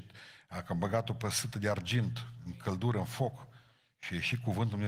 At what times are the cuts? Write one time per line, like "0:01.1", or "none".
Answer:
none